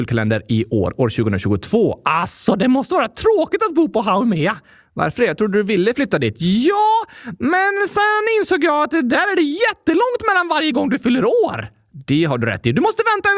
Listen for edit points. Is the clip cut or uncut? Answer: uncut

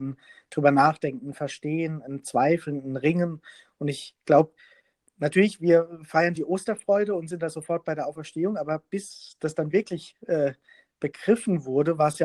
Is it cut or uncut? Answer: uncut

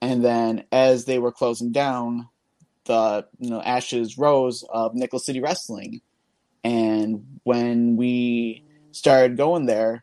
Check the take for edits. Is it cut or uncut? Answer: uncut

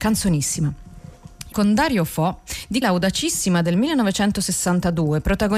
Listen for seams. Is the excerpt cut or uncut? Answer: cut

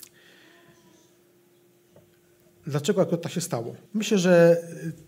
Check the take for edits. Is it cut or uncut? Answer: cut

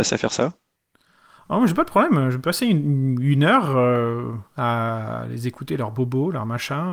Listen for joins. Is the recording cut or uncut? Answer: uncut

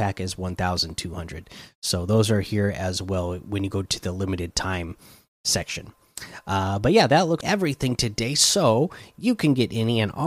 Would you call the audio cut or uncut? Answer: cut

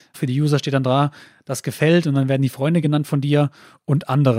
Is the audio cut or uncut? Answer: uncut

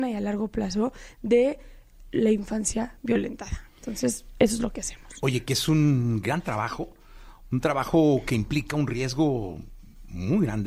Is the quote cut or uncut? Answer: uncut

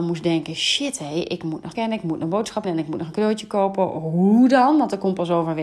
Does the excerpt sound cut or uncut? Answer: cut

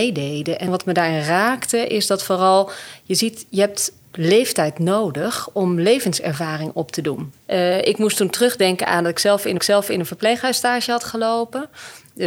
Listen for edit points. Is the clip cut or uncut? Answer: cut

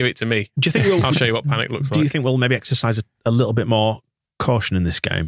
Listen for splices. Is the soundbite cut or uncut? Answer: uncut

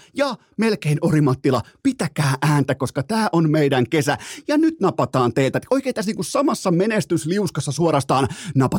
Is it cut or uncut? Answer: uncut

